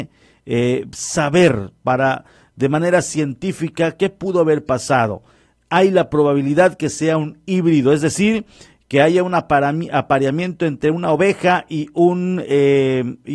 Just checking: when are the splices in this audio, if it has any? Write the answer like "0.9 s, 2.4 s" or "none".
none

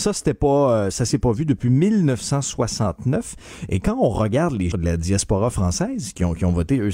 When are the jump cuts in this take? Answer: 4.7 s

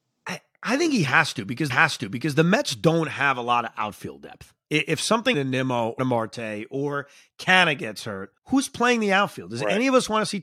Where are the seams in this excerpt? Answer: 1.7 s, 5.3 s, 6.0 s, 8.4 s

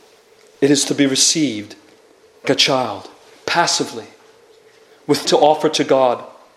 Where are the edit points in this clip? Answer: 2.4 s, 5.2 s

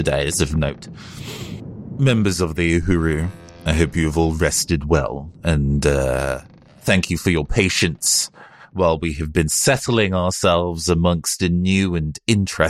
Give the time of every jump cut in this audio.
none

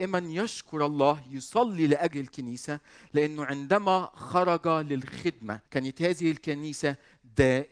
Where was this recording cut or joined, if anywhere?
2.1 s, 5.7 s

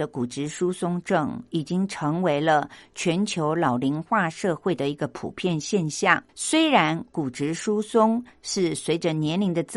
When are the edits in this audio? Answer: 6.3 s

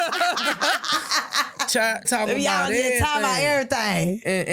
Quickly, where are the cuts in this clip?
2.0 s

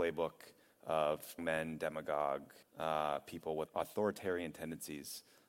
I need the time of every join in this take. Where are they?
1.4 s, 2.6 s, 3.7 s

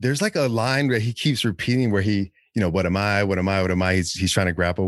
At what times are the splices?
none

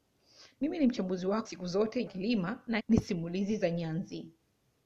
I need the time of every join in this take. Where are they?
1.5 s, 2.1 s, 2.8 s

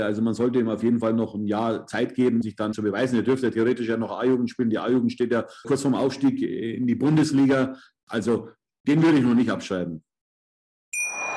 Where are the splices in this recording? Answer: 2.4 s, 2.7 s, 5.6 s

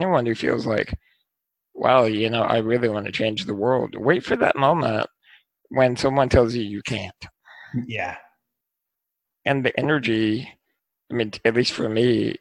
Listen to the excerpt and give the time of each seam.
none

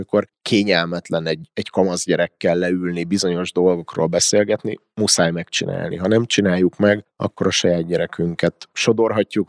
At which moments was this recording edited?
none

